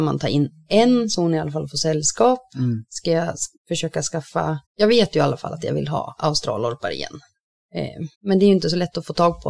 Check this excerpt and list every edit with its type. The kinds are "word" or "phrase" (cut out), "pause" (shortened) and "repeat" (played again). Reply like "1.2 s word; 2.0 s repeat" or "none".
3.6 s pause; 4.6 s pause; 8.1 s pause